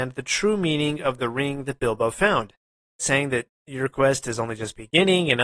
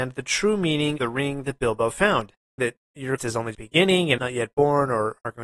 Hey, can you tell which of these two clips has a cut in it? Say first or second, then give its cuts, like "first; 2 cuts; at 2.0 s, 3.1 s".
second; 5 cuts; at 1.0 s, 2.6 s, 3.2 s, 3.5 s, 4.2 s